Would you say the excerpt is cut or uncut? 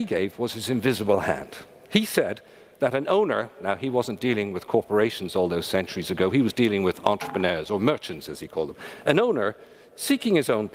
uncut